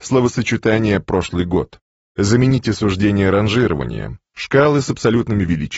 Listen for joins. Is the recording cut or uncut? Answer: uncut